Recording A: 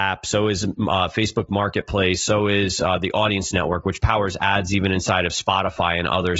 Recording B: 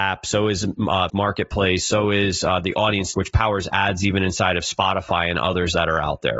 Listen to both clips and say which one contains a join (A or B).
B